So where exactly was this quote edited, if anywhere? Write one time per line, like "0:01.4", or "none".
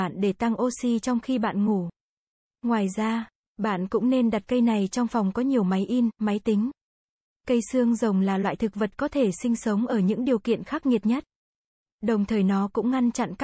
none

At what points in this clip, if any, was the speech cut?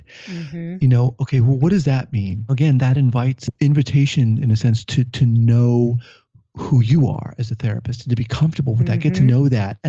none

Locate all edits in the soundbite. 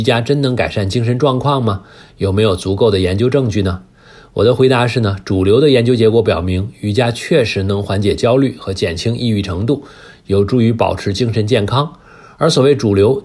none

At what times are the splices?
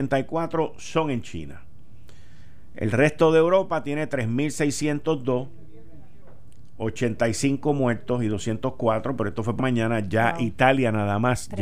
0:09.6

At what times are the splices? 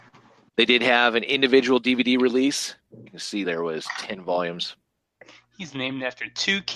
0:03.1
0:03.4

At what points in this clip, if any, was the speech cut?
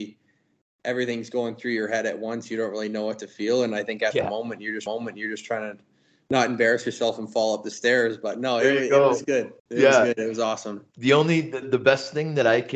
0:04.9
0:09.6
0:10.9
0:11.6

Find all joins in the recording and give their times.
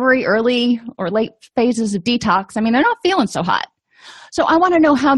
none

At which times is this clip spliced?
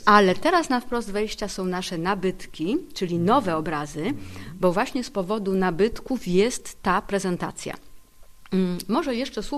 none

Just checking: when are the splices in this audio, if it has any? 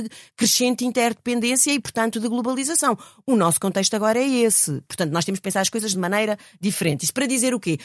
none

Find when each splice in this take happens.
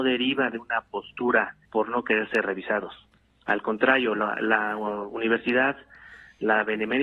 0:01.6

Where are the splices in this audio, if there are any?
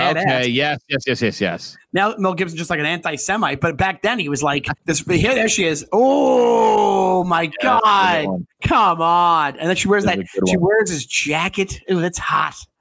0:04.8
0:08.5

